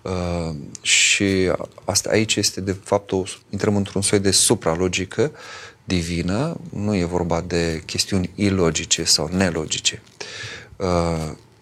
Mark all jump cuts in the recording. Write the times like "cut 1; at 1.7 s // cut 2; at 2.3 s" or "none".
cut 1; at 3.4 s

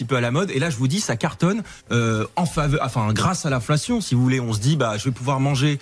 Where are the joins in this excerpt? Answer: cut 1; at 1.8 s

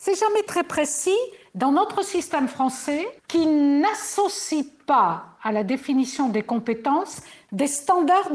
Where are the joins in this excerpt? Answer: cut 1; at 3.2 s

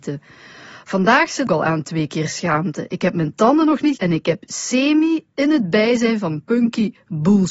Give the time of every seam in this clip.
cut 1; at 1.5 s // cut 2; at 4.0 s

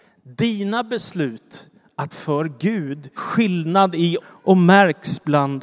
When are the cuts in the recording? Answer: cut 1; at 2.1 s // cut 2; at 3.2 s // cut 3; at 4.2 s

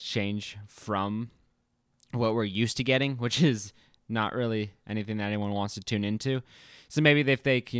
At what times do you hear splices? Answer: none

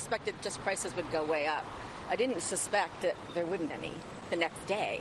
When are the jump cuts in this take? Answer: cut 1; at 3.7 s

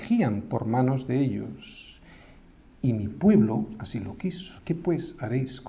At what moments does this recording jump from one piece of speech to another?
cut 1; at 4.6 s

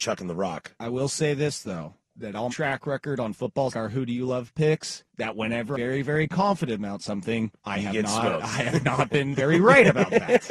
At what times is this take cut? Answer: cut 1; at 2.0 s // cut 2; at 2.5 s // cut 3; at 3.7 s // cut 4; at 5.1 s // cut 5; at 5.7 s // cut 6; at 7.6 s // cut 7; at 9.3 s

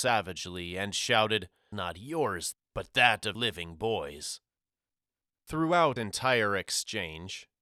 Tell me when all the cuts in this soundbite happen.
cut 1; at 1.7 s // cut 2; at 2.5 s // cut 3; at 3.4 s // cut 4; at 6.0 s

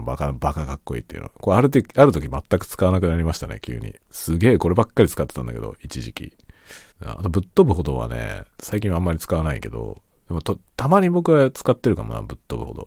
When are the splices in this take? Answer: cut 1; at 4.0 s // cut 2; at 6.9 s // cut 3; at 8.5 s

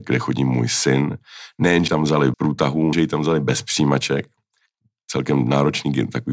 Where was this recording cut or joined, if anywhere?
cut 1; at 1.9 s // cut 2; at 2.3 s // cut 3; at 2.9 s

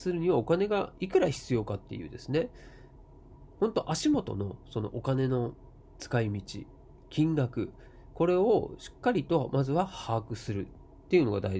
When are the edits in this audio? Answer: none

